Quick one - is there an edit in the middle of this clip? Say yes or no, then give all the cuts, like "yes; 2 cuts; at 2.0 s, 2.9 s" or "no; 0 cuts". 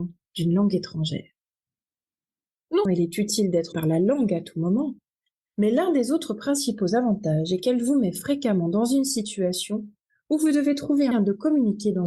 yes; 3 cuts; at 2.9 s, 3.7 s, 11.1 s